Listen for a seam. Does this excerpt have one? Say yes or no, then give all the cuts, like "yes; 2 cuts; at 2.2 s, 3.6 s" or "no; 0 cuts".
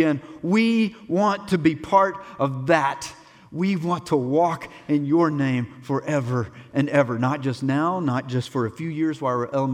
no; 0 cuts